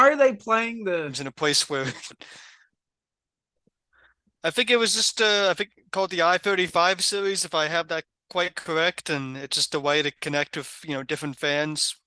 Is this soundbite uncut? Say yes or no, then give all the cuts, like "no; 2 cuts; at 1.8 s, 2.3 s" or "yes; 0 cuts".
yes; 0 cuts